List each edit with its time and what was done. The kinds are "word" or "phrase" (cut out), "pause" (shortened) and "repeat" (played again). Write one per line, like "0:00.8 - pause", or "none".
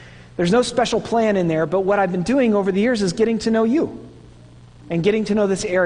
none